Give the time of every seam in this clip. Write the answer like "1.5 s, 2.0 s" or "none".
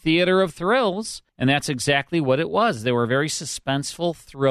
1.3 s